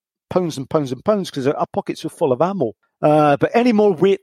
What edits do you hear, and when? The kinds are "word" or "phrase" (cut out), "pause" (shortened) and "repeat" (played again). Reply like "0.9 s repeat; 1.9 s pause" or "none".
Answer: none